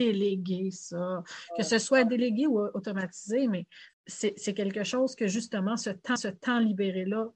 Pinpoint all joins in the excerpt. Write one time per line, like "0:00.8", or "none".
0:03.9
0:06.2